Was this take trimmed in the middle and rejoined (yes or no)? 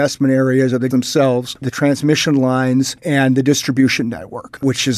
yes